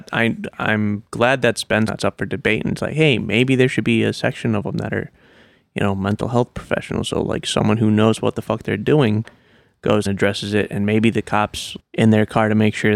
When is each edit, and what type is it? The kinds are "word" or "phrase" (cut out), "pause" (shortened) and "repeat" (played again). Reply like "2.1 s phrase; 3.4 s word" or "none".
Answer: 1.9 s word; 10.1 s word; 11.8 s word